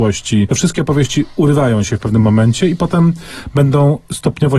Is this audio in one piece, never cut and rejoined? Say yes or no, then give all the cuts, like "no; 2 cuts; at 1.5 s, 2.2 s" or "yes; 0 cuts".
yes; 0 cuts